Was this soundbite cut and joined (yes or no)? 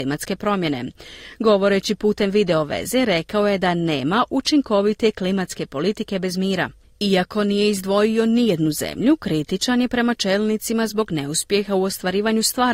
no